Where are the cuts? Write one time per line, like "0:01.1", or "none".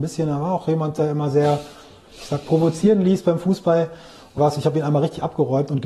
0:02.4
0:04.4